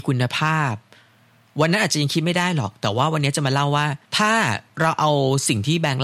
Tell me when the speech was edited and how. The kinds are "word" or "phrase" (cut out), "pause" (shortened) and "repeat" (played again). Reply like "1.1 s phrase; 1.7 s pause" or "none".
4.0 s pause; 4.7 s pause